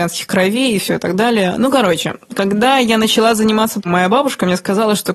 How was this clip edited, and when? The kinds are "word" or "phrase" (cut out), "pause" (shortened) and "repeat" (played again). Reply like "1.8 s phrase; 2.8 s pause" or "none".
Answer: 3.8 s word

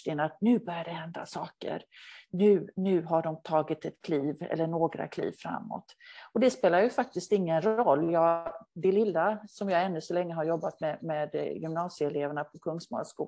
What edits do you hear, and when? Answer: none

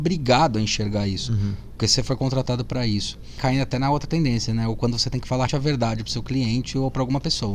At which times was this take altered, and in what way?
4.8 s word; 5.5 s word

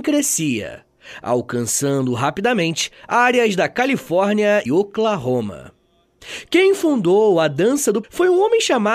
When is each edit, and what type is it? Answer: 4.7 s word; 8.0 s word

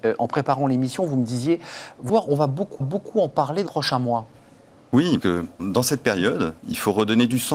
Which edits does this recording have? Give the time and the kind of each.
2.1 s word; 2.8 s repeat; 3.7 s word; 5.2 s phrase; 5.6 s word; 6.6 s pause

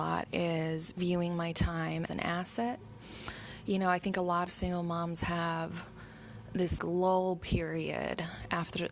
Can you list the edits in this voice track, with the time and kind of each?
2.1 s word; 4.5 s word; 6.8 s word

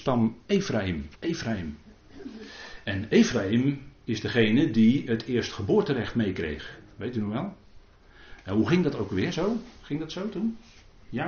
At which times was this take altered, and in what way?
1.1 s pause

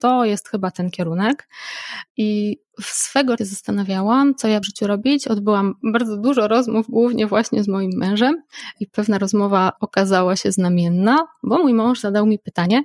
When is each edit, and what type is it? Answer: 3.4 s phrase; 4.6 s phrase

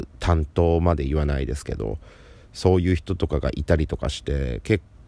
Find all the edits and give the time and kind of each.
none

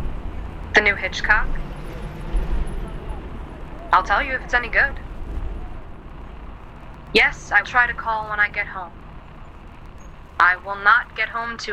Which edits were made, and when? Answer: 7.6 s word

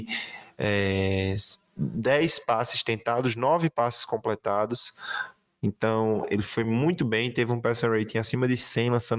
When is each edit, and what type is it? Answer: none

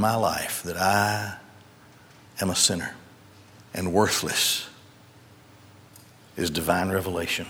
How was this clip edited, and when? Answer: 3.3 s pause

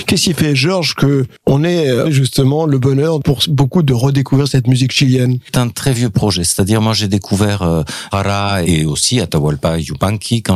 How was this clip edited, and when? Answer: 2.0 s word; 8.1 s word; 8.6 s word

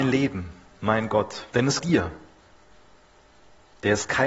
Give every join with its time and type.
1.8 s word

